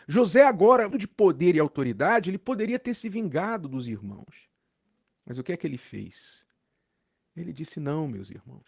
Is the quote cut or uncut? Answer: cut